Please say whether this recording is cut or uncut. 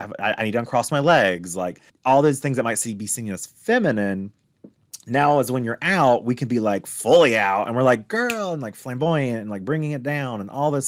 cut